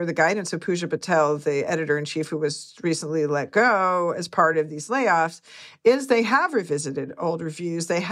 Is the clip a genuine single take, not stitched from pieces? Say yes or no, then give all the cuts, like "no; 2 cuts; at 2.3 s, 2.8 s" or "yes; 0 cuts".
yes; 0 cuts